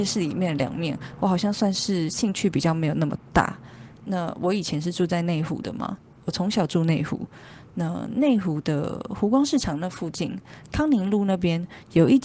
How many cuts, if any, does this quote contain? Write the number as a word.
two